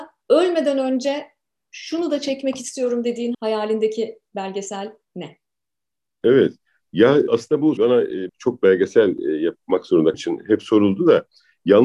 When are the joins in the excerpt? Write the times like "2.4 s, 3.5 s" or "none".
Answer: 3.3 s, 7.3 s, 7.8 s, 8.3 s, 10.1 s